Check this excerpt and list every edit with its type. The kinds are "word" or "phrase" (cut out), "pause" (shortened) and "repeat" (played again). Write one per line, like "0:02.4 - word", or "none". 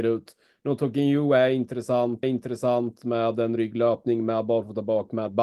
0:02.2 - repeat